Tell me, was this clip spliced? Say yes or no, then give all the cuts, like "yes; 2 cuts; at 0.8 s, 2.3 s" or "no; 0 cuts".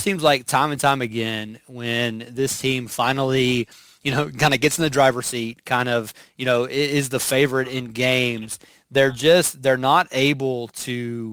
no; 0 cuts